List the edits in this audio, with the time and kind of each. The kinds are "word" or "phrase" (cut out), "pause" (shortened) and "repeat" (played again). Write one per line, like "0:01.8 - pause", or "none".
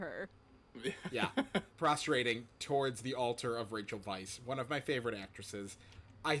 none